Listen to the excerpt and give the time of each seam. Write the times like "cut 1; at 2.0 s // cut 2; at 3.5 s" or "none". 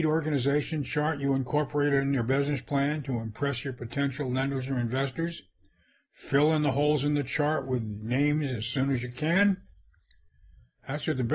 none

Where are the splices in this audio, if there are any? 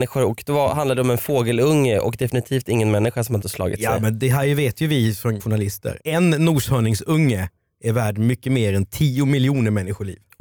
cut 1; at 3.4 s // cut 2; at 5.4 s // cut 3; at 6.0 s

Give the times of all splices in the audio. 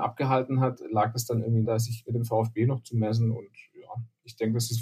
cut 1; at 1.6 s

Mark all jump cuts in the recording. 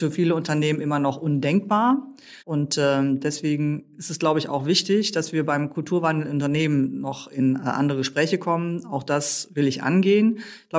cut 1; at 2.4 s

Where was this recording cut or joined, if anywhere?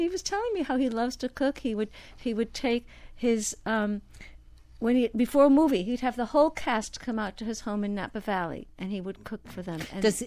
none

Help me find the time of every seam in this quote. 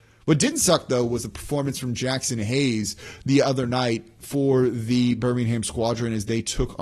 none

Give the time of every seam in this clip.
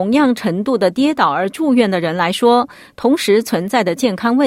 none

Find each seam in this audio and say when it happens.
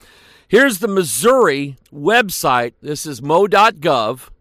cut 1; at 1.8 s

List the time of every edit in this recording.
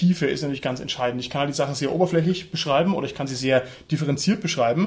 none

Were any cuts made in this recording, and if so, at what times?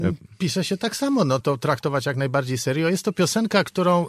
cut 1; at 1.4 s

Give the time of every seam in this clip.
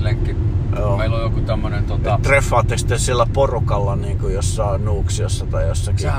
none

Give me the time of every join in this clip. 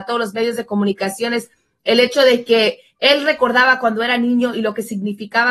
none

